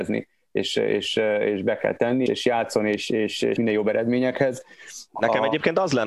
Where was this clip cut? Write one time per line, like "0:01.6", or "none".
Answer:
0:02.3
0:03.6
0:05.1